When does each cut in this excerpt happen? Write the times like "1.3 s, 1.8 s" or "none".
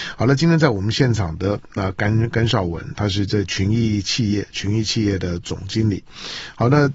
none